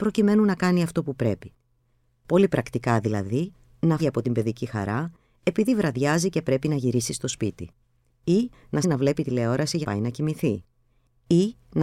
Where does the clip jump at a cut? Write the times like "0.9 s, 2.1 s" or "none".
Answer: 4.0 s, 8.8 s, 9.8 s